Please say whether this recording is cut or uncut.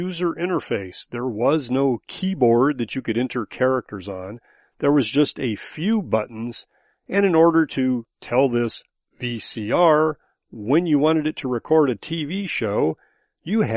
uncut